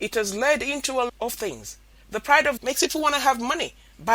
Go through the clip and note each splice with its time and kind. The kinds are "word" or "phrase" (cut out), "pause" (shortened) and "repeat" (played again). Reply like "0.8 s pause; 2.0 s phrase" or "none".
1.1 s word; 2.6 s word